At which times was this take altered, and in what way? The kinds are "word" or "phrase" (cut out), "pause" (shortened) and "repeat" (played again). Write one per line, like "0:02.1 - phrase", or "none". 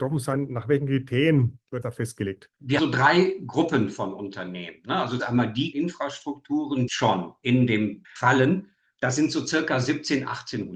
0:01.8 - phrase
0:02.8 - word
0:05.2 - word
0:05.7 - word
0:06.9 - phrase
0:08.0 - phrase